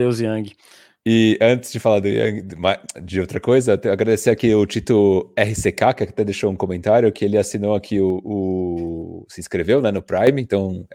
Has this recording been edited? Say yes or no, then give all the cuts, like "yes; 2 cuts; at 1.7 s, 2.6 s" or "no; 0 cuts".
no; 0 cuts